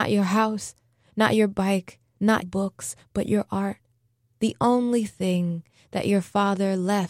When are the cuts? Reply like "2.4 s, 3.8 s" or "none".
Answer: 2.4 s

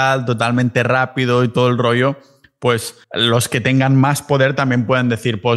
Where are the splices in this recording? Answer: 3.0 s

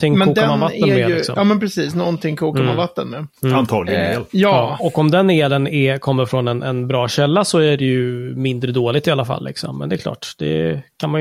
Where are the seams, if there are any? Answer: 3.4 s, 4.3 s, 4.8 s

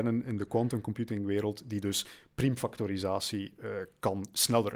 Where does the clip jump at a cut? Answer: none

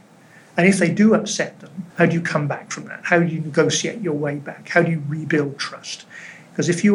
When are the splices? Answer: 1.9 s

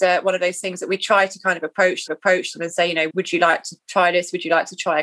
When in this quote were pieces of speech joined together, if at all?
2.1 s, 3.1 s

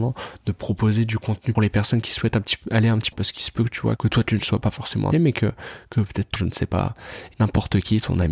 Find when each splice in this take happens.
1.6 s, 3.1 s, 4.0 s, 5.1 s, 6.4 s, 7.3 s

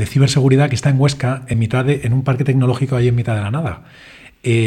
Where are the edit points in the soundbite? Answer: none

